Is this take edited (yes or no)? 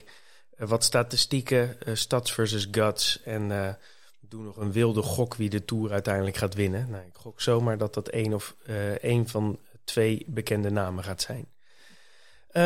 no